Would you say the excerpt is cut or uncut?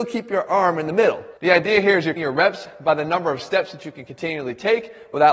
cut